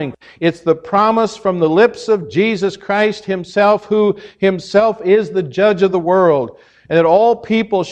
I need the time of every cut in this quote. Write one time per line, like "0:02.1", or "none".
none